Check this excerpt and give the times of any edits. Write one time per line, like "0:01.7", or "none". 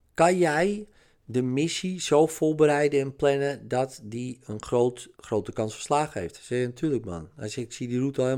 0:05.1